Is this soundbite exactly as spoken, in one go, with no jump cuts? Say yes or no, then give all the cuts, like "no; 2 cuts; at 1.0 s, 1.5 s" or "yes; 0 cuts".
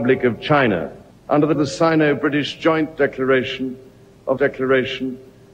no; 3 cuts; at 1.1 s, 1.5 s, 4.4 s